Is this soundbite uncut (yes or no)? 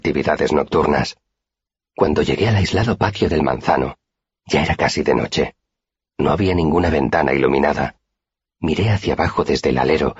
yes